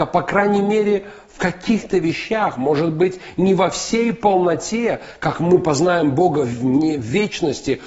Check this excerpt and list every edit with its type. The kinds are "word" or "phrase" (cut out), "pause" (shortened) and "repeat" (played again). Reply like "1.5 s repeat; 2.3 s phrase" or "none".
none